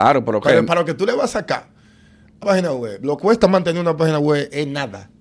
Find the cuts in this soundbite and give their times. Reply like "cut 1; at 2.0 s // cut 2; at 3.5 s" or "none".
cut 1; at 2.4 s // cut 2; at 3.2 s